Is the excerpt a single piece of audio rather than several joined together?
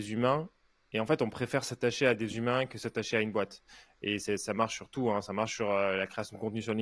yes; 0 cuts

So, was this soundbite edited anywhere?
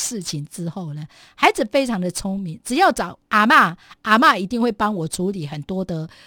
no; 0 cuts

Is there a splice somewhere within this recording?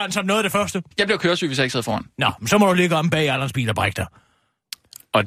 yes; 1 cut; at 0.9 s

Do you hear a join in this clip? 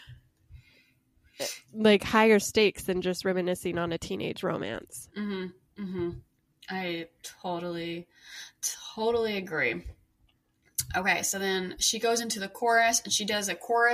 no; 0 cuts

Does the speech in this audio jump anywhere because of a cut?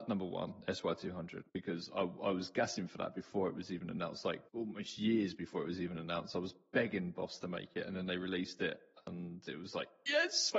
yes; 2 cuts; at 1.5 s, 4.5 s

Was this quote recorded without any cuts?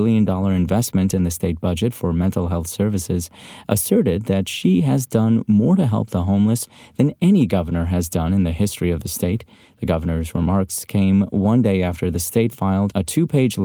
yes; 0 cuts

